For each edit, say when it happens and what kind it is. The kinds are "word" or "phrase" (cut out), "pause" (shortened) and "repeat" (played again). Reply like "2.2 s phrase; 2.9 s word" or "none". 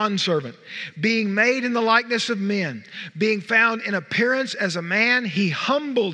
none